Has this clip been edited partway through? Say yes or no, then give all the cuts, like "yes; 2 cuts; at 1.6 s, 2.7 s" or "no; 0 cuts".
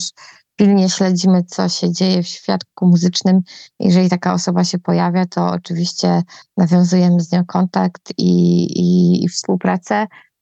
no; 0 cuts